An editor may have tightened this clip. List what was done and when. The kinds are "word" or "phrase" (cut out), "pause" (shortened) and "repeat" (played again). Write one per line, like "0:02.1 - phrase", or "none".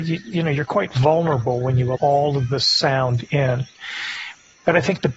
0:01.9 - word